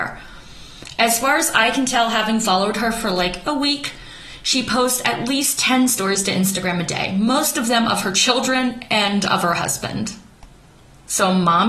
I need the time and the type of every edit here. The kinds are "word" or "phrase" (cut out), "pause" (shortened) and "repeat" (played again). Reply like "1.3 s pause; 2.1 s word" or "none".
none